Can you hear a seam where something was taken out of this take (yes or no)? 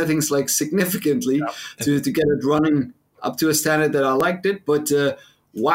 no